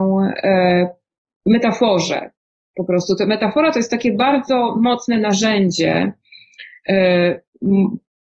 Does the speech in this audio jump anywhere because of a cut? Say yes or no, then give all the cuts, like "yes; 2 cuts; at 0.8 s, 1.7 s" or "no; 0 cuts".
no; 0 cuts